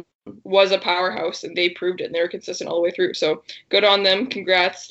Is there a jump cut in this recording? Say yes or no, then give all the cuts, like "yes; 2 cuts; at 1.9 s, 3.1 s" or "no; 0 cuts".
yes; 1 cut; at 1.5 s